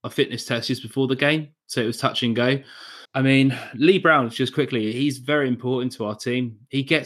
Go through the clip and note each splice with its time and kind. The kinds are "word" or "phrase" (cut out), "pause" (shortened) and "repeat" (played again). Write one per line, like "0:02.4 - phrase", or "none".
0:03.1 - pause